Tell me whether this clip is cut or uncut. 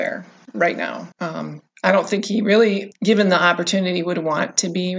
cut